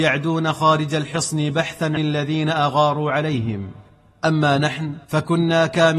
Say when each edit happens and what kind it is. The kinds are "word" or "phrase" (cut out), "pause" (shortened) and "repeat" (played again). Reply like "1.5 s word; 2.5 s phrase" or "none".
2.0 s word; 3.9 s pause; 5.0 s pause